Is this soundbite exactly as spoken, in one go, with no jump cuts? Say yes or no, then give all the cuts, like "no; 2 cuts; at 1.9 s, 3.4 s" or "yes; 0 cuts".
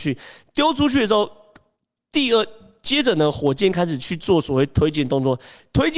yes; 0 cuts